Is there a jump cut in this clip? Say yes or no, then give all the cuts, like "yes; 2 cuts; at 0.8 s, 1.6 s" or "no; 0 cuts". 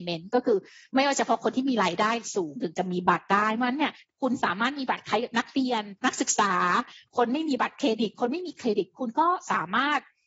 yes; 1 cut; at 6.0 s